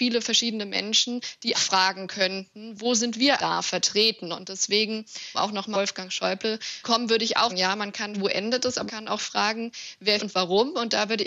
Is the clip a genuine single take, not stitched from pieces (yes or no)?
no